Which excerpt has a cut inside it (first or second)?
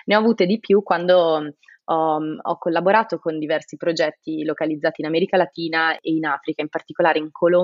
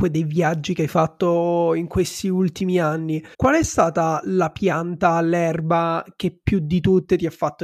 second